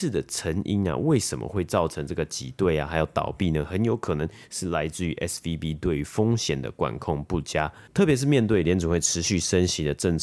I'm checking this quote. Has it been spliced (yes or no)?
no